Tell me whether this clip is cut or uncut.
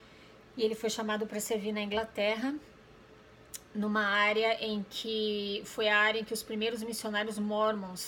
uncut